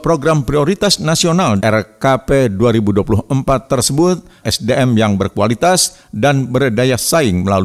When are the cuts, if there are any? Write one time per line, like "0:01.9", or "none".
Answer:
0:01.6
0:04.4